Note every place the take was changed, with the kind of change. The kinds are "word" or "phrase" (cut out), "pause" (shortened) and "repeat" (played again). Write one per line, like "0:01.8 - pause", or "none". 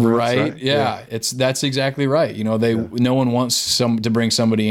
none